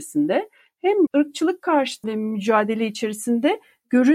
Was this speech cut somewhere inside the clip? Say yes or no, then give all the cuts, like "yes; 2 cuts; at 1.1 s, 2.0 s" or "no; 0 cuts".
yes; 2 cuts; at 1.1 s, 2.0 s